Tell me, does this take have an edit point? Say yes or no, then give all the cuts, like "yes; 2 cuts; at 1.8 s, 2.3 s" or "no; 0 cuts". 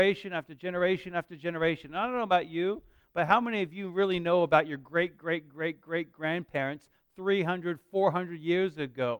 no; 0 cuts